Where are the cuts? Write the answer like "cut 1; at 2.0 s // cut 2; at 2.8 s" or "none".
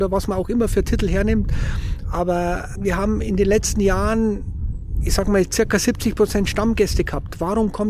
cut 1; at 2.7 s